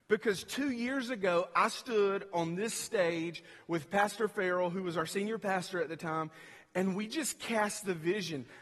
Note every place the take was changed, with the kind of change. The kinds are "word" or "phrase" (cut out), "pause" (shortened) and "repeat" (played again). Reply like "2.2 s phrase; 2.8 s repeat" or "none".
none